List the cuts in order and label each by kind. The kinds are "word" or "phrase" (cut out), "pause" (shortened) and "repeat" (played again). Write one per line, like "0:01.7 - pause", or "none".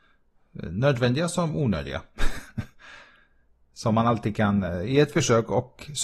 none